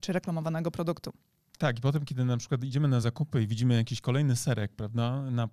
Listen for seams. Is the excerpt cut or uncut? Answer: uncut